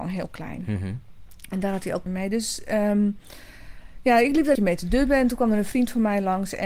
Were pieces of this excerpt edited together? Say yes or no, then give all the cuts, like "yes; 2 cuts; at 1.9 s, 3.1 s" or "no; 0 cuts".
yes; 2 cuts; at 2.1 s, 4.5 s